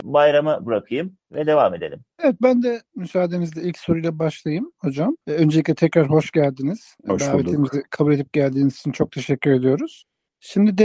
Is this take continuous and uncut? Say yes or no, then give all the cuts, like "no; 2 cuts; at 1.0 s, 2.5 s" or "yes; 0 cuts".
no; 4 cuts; at 1.2 s, 2.9 s, 5.2 s, 7.0 s